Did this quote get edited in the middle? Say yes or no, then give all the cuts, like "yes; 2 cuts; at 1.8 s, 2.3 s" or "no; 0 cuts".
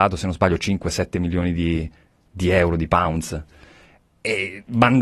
no; 0 cuts